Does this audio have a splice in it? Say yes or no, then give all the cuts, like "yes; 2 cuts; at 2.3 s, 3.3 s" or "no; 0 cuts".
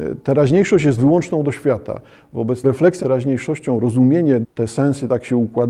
yes; 4 cuts; at 1.0 s, 2.6 s, 3.0 s, 4.4 s